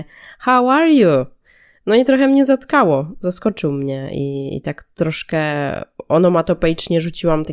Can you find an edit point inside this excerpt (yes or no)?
no